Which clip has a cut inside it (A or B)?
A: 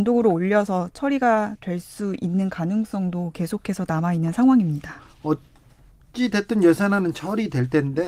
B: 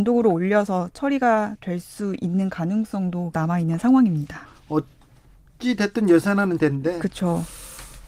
B